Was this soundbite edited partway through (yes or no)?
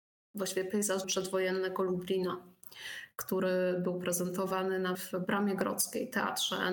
yes